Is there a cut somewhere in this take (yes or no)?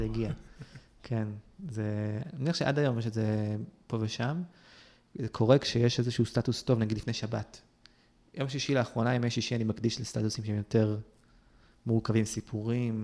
no